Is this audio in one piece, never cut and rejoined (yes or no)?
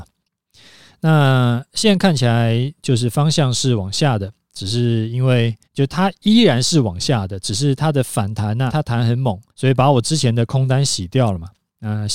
no